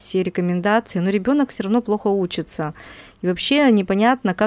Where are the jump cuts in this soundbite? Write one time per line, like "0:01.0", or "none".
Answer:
none